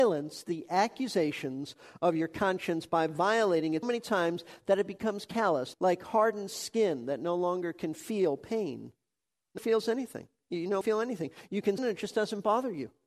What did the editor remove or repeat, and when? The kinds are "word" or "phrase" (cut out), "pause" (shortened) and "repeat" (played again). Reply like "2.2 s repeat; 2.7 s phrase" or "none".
3.8 s word; 5.7 s word; 9.6 s word; 10.8 s word; 11.8 s word